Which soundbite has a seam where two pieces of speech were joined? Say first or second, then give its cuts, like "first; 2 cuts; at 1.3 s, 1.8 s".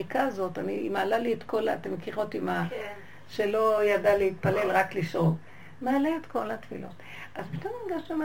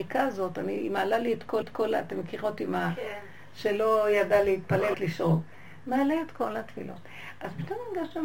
second; 2 cuts; at 1.6 s, 4.9 s